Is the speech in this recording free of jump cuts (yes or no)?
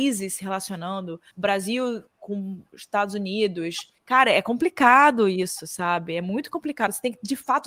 no